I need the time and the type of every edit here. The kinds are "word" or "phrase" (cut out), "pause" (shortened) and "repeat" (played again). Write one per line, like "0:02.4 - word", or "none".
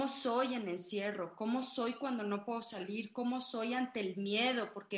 none